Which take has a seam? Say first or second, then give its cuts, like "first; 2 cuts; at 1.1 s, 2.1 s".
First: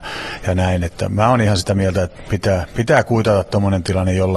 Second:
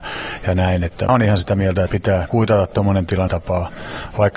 second; 4 cuts; at 1.1 s, 1.9 s, 2.3 s, 3.3 s